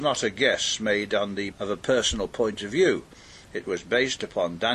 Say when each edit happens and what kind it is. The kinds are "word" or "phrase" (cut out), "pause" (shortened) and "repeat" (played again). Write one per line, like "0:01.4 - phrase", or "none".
0:01.5 - word